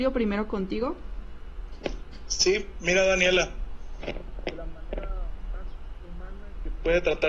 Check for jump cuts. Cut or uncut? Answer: uncut